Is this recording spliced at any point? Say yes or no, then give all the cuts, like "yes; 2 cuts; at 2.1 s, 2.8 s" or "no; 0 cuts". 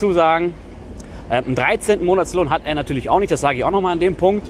no; 0 cuts